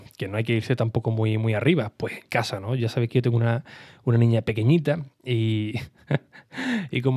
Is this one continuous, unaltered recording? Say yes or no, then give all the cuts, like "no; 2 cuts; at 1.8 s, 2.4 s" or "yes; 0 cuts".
yes; 0 cuts